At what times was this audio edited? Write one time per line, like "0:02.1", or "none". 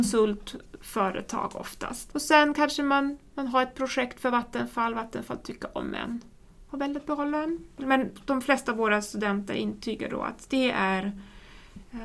none